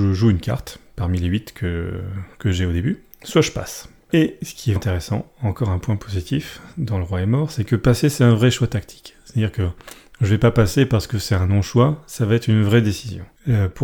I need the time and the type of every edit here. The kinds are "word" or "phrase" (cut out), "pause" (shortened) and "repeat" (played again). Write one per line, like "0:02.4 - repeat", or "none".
0:04.8 - word